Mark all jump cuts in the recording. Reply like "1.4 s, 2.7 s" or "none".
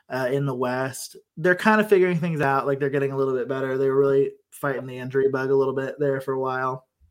1.3 s